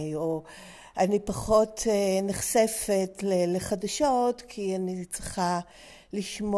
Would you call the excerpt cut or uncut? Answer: uncut